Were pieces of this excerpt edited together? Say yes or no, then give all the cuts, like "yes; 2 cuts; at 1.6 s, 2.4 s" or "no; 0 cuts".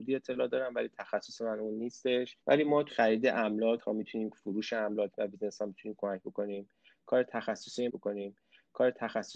yes; 5 cuts; at 2.4 s, 2.9 s, 3.8 s, 4.3 s, 7.9 s